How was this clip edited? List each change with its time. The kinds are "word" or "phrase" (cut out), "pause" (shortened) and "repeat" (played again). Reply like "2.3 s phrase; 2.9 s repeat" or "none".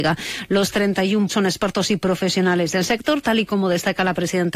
1.3 s word